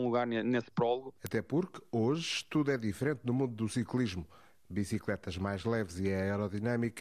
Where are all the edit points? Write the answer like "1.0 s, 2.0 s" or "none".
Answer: none

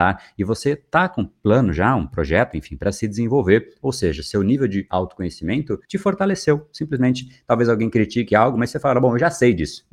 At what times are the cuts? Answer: 5.8 s

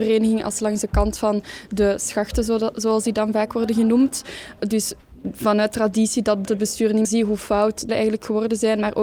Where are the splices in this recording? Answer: 6.4 s, 7.0 s, 7.9 s

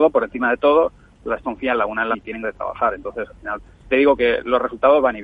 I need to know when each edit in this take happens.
1.4 s, 2.1 s, 2.4 s, 3.9 s

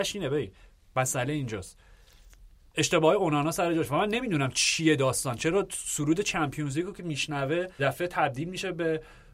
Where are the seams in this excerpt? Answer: 7.8 s

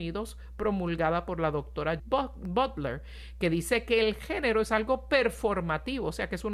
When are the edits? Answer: 2.0 s

